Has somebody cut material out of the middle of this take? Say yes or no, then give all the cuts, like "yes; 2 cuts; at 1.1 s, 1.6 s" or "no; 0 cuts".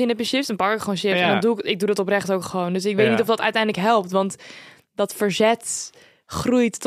no; 0 cuts